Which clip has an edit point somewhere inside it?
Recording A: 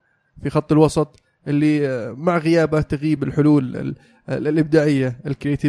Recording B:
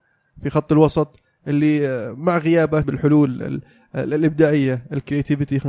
B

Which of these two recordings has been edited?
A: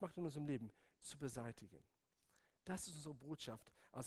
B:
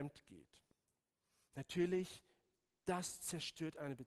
A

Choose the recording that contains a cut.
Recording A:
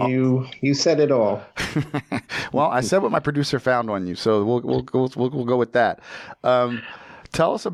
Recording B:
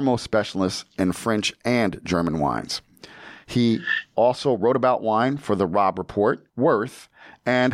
B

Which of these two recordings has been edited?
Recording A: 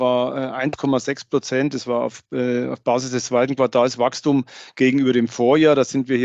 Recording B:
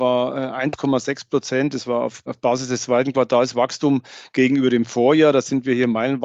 B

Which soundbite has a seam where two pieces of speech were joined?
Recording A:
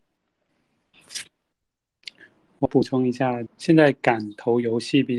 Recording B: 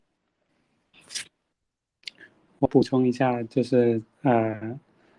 A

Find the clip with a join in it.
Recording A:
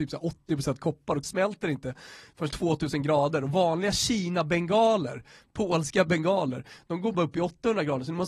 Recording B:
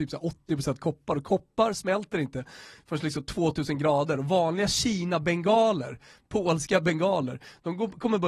A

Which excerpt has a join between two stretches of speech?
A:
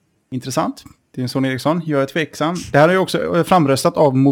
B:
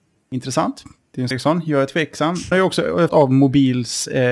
B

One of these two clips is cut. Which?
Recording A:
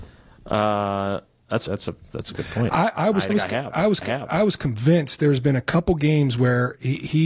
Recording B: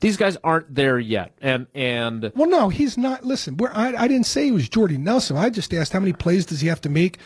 A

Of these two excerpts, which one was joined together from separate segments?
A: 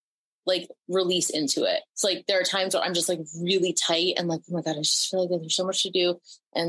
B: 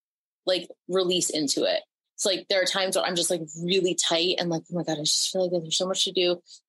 A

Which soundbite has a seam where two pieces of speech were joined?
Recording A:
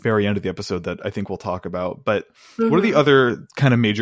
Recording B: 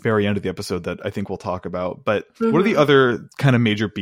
B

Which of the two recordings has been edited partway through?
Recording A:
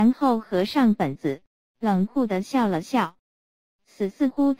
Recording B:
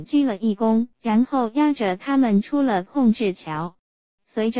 B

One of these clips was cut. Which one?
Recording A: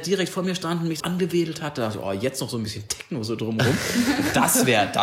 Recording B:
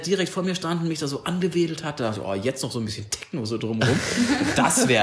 A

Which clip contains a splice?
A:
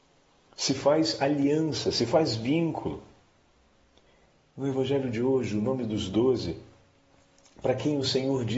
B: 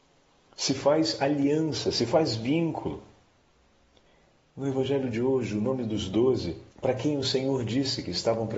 B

